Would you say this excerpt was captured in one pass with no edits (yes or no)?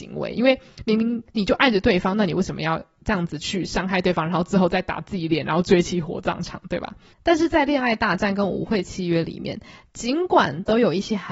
yes